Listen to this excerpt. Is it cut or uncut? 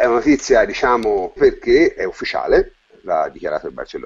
cut